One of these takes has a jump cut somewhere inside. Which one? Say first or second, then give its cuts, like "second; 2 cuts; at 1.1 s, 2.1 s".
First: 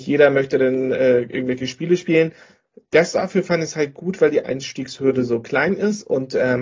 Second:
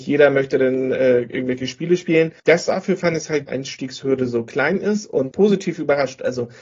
second; 3 cuts; at 2.4 s, 3.5 s, 5.3 s